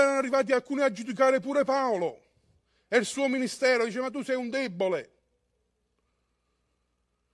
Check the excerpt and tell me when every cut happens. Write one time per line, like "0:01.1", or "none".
none